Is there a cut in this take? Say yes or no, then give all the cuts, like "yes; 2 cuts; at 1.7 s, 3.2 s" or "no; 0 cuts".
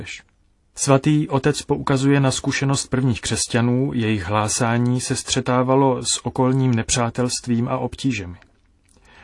no; 0 cuts